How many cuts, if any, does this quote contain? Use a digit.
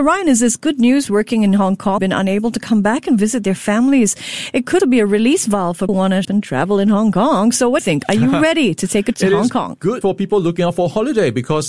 8